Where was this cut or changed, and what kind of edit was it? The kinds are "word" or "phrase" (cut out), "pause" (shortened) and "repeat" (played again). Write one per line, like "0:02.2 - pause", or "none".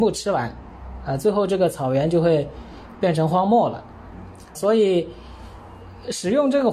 0:04.5 - word